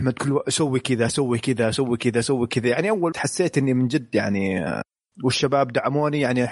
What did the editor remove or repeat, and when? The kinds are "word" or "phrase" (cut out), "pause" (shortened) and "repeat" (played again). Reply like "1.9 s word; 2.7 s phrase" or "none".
3.1 s word; 5.1 s word

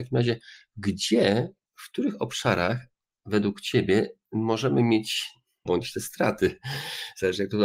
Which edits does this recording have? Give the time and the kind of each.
5.7 s phrase

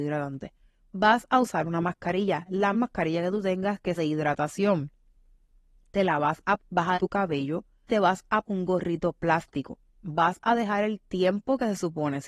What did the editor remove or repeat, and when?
2.7 s word; 4.0 s word; 6.6 s word; 6.9 s word; 7.9 s word; 8.4 s word

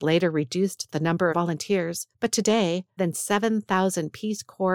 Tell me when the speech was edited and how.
1.3 s phrase; 2.1 s pause; 3.0 s word

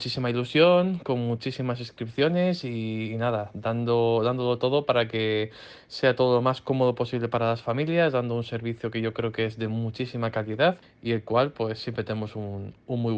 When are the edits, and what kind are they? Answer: 10.8 s pause

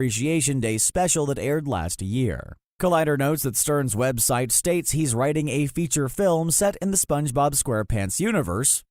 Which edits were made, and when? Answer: none

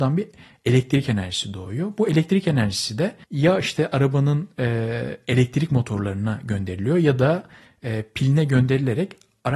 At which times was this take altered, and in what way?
3.2 s pause

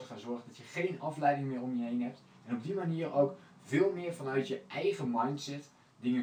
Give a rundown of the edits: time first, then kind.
none

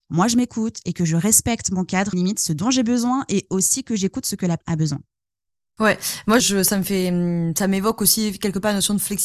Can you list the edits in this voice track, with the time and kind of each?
2.1 s word; 4.6 s word; 6.4 s word

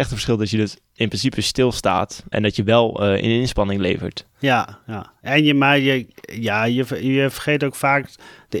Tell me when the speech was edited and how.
2.3 s word; 7.3 s word

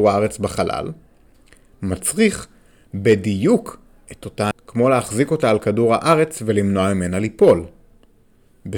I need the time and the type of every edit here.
4.5 s word

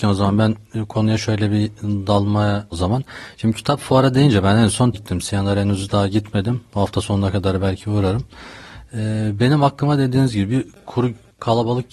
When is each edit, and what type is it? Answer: 2.7 s word; 4.9 s word

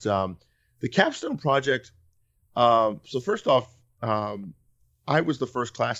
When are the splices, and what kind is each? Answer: none

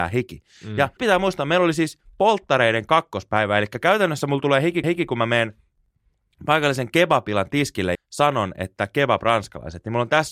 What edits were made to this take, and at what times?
1.0 s word; 4.8 s repeat; 7.9 s word

